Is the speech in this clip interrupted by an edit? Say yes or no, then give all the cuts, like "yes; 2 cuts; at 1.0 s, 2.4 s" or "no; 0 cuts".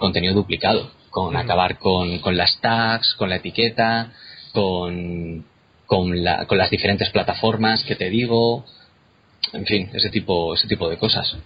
no; 0 cuts